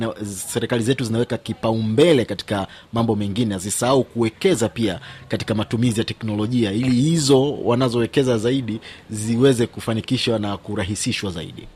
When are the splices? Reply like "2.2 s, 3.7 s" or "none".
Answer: none